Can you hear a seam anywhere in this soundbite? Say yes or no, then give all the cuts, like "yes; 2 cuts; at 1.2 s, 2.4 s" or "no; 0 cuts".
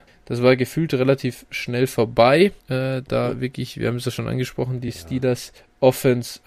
yes; 1 cut; at 2.6 s